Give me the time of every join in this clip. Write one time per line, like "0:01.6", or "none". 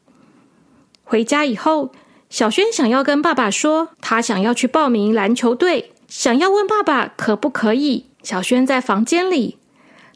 0:03.9
0:06.0
0:08.1

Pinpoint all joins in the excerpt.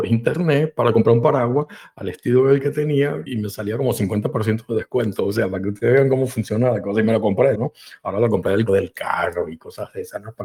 0:03.3
0:07.6
0:08.7

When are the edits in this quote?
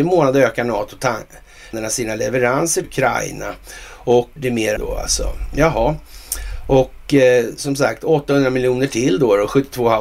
0:01.7
0:02.8
0:04.4
0:04.8

